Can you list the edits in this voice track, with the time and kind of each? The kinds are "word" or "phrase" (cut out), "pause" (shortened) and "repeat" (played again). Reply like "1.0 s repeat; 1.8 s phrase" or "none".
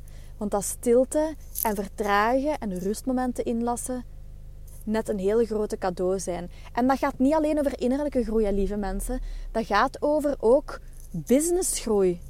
none